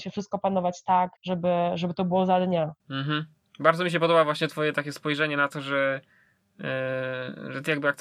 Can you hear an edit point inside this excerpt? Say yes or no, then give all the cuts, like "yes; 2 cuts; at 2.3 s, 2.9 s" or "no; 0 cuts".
yes; 2 cuts; at 1.2 s, 2.8 s